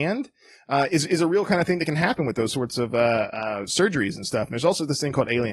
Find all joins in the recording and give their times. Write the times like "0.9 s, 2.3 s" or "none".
none